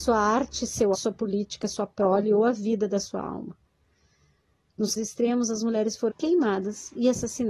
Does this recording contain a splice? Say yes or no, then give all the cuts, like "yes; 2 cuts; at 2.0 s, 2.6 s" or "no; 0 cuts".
yes; 3 cuts; at 0.9 s, 5.0 s, 6.1 s